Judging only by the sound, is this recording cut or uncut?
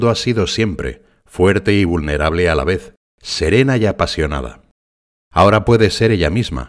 uncut